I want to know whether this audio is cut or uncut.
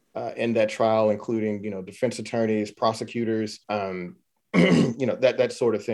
cut